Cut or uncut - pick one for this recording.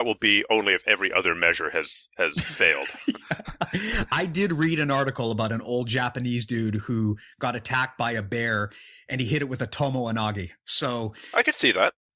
uncut